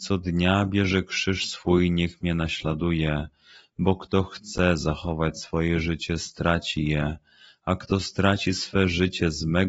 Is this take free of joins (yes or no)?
yes